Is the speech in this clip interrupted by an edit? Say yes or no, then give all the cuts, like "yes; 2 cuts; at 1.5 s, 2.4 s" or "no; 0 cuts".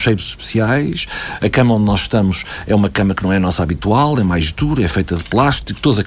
no; 0 cuts